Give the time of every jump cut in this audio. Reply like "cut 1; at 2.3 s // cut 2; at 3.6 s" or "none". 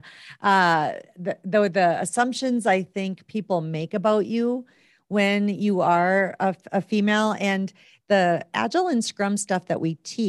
none